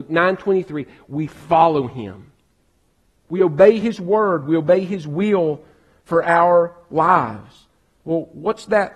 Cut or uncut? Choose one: uncut